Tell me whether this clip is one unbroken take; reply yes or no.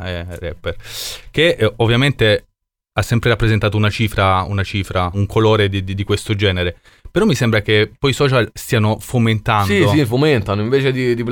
yes